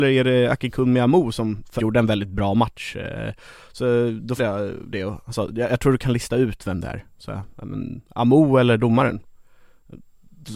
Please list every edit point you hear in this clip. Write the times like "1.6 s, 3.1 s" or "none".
1.8 s, 4.4 s